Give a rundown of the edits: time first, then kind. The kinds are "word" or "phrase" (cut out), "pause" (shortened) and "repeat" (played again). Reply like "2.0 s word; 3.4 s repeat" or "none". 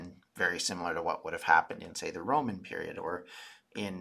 none